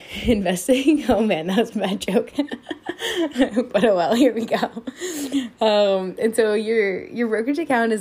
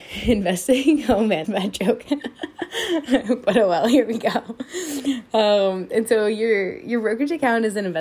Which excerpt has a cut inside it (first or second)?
second